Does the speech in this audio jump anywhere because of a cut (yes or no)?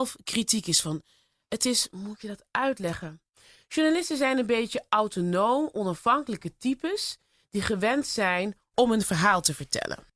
no